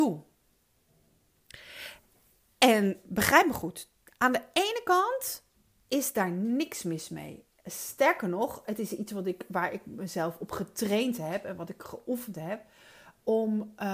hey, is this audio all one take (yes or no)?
yes